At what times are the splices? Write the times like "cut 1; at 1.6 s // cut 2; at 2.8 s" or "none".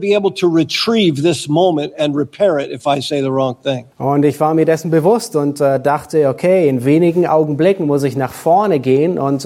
cut 1; at 3.9 s